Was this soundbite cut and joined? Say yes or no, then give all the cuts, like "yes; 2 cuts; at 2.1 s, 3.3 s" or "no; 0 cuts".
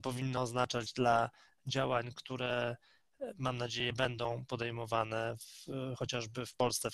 no; 0 cuts